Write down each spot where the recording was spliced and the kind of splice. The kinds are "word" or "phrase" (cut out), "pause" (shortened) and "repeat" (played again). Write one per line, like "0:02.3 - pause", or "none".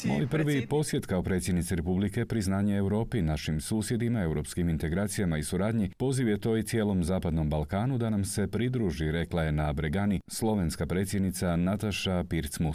none